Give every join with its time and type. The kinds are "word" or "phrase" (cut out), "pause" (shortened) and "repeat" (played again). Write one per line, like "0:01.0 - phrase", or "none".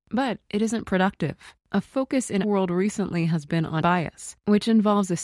0:02.4 - word
0:03.8 - word